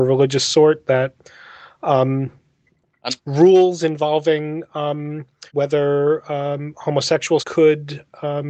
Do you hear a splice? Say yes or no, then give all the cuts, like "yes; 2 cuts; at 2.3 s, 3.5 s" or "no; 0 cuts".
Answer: yes; 3 cuts; at 3.2 s, 5.5 s, 7.4 s